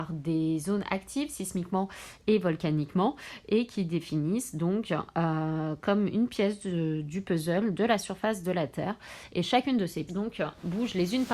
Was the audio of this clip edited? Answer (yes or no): yes